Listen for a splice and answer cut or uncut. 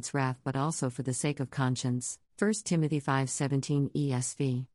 cut